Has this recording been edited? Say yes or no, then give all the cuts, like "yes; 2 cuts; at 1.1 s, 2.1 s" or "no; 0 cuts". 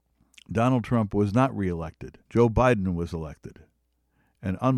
yes; 1 cut; at 2.2 s